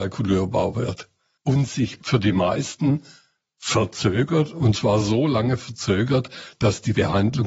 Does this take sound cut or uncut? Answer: uncut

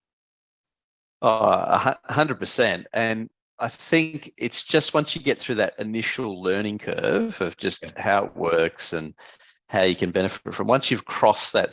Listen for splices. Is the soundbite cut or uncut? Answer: uncut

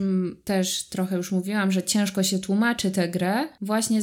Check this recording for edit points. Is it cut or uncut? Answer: uncut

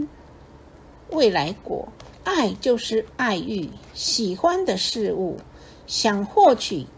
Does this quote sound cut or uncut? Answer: cut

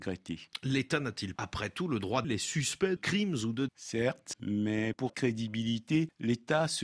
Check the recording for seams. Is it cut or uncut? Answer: cut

